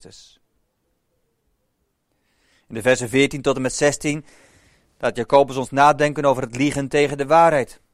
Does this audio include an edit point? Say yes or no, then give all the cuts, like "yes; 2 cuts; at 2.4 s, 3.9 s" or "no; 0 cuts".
no; 0 cuts